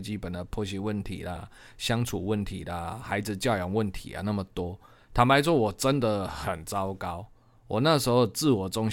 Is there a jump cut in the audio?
no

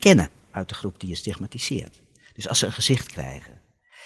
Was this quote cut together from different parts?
no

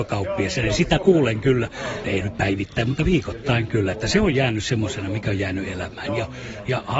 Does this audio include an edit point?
yes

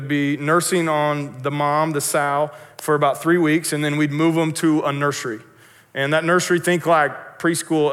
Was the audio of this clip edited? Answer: no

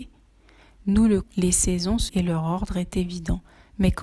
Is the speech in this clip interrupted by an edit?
yes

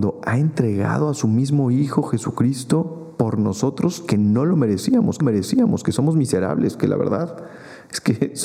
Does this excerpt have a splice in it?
yes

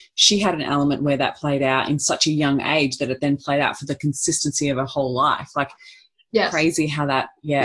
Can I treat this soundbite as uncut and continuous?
yes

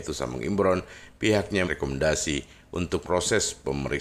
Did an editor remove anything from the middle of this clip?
yes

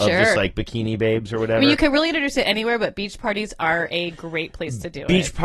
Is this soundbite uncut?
yes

